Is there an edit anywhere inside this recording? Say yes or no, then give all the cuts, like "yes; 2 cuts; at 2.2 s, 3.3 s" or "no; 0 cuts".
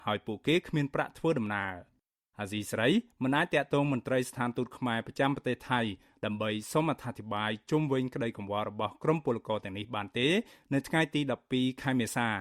no; 0 cuts